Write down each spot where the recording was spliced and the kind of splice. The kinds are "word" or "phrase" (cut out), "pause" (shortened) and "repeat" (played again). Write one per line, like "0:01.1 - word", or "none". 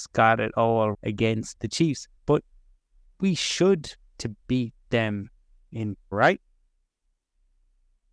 0:00.9 - word
0:01.5 - word
0:02.2 - pause
0:04.0 - phrase
0:04.4 - pause
0:06.1 - word